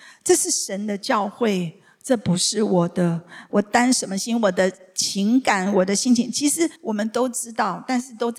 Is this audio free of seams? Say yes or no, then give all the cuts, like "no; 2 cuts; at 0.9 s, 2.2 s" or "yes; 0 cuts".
no; 1 cut; at 6.8 s